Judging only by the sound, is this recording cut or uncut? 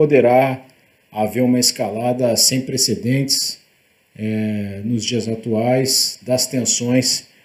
uncut